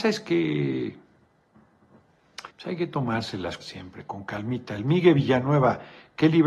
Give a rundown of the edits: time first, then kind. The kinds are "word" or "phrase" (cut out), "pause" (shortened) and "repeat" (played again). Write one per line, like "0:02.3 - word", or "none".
0:02.5 - pause
0:03.6 - word